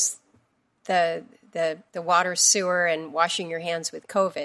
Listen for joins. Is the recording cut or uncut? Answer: cut